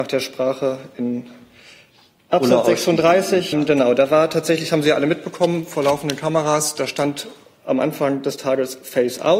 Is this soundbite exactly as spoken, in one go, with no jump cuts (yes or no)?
no